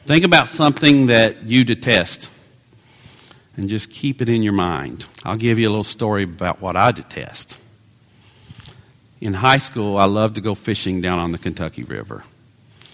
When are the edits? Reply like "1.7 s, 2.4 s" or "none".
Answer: 5.1 s